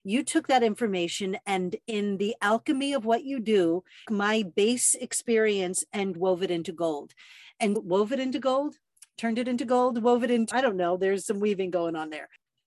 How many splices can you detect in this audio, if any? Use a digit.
4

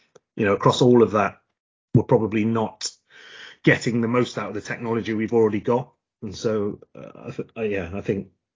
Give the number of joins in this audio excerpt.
1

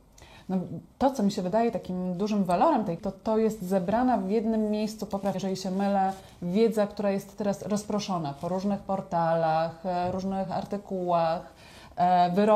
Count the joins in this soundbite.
3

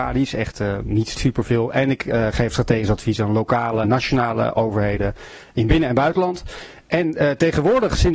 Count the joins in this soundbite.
2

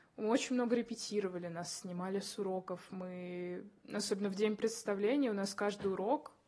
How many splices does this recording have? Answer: 0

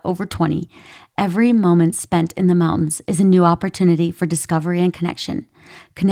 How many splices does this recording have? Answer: 0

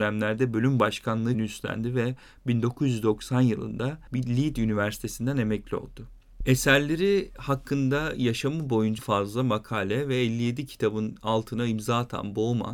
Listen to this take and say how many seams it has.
2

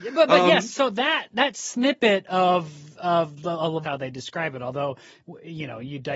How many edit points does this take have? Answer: 1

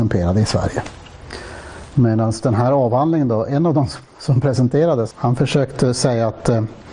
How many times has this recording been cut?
1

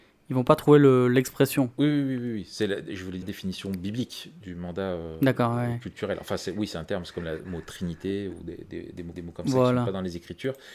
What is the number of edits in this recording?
2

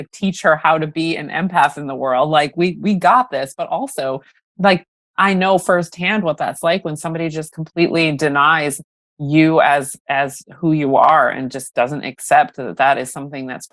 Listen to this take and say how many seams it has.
0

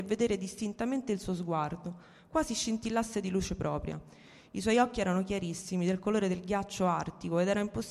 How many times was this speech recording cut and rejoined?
0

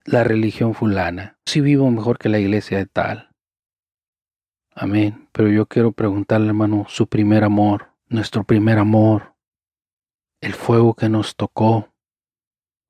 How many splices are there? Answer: 2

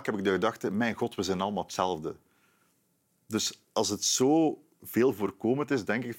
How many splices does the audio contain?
1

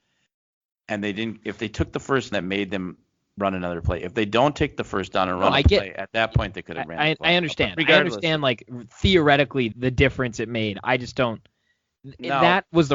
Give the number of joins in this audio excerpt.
2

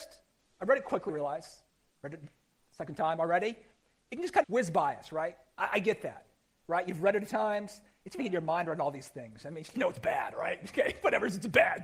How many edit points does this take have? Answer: 5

